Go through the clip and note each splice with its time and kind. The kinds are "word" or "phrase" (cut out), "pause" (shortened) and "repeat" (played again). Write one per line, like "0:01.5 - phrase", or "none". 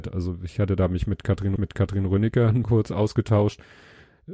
0:01.6 - repeat
0:02.6 - word